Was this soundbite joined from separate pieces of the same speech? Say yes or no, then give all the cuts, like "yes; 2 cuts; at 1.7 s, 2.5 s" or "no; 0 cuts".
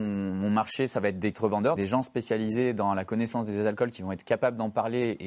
yes; 2 cuts; at 1.3 s, 1.8 s